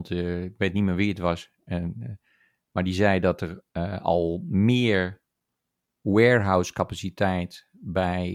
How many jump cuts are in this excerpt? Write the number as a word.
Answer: one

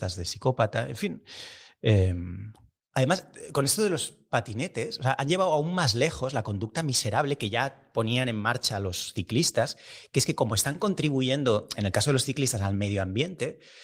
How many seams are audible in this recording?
zero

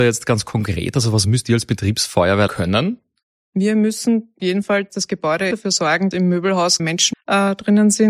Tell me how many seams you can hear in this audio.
eight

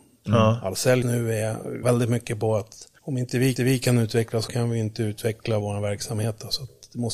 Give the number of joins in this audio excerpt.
six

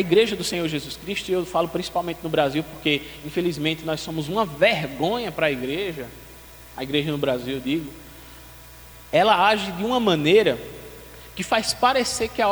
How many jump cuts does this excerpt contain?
zero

